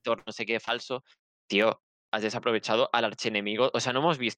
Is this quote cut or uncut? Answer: uncut